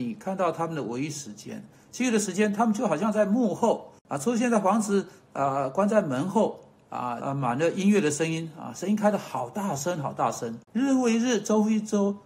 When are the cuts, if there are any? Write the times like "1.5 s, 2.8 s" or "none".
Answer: 4.0 s, 7.2 s, 10.6 s